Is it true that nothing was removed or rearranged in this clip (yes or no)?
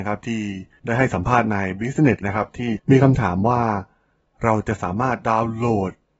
no